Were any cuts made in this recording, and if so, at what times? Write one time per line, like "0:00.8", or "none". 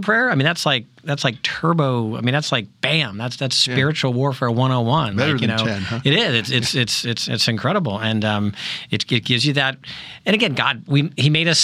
none